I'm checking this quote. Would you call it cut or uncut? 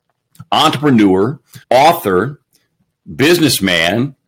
cut